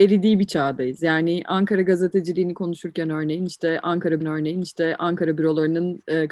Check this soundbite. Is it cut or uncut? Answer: cut